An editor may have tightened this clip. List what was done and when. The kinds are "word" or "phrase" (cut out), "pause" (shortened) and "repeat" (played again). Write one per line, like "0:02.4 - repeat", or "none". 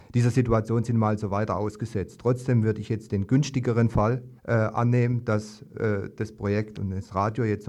0:04.4 - pause